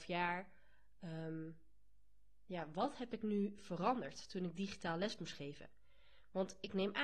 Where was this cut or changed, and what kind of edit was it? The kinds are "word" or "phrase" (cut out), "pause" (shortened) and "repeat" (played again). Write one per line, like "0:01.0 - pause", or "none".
none